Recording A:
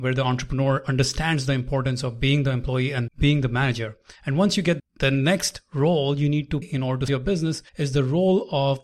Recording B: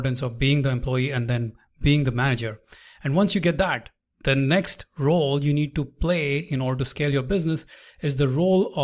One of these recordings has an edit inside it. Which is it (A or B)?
A